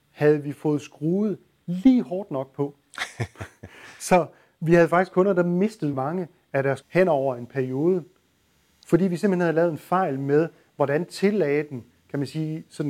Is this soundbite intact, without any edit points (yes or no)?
no